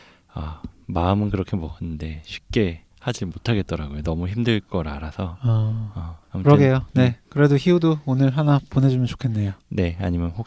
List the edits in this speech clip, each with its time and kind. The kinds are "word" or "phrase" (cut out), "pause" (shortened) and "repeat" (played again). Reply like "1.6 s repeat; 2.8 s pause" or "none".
2.9 s pause; 6.2 s pause